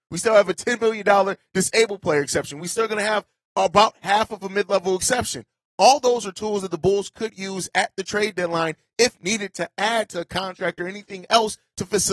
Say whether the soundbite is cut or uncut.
uncut